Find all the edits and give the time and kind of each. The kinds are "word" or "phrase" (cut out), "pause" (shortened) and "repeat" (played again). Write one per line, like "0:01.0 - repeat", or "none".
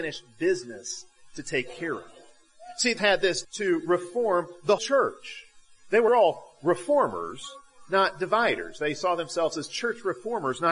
0:03.0 - word
0:03.4 - word
0:04.8 - word
0:06.1 - word